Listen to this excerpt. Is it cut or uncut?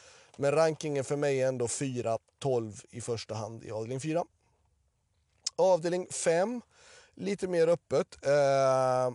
uncut